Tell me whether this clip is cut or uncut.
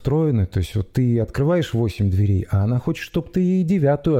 uncut